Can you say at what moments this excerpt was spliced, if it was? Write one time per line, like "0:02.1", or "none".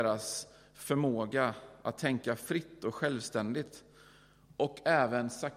none